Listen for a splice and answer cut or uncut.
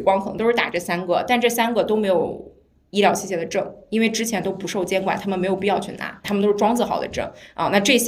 cut